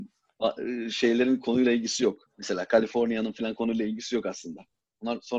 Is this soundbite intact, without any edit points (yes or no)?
no